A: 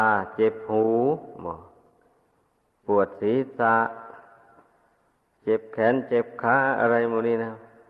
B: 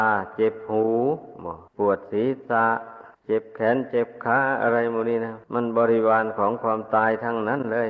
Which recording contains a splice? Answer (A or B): B